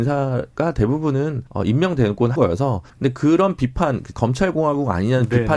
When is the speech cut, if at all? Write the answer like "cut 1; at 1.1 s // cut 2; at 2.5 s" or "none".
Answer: cut 1; at 1.5 s // cut 2; at 2.4 s // cut 3; at 2.9 s // cut 4; at 4.1 s